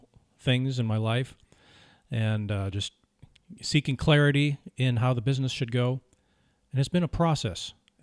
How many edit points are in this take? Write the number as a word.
zero